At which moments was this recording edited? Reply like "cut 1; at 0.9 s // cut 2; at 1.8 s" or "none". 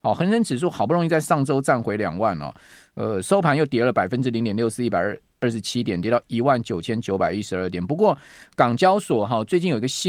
none